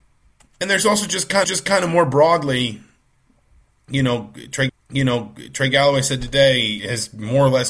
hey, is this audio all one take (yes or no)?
no